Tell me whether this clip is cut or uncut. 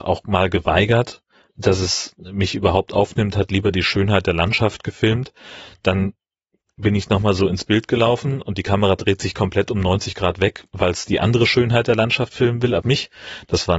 cut